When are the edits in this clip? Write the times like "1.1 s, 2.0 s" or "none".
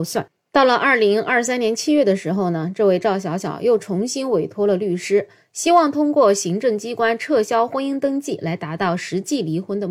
none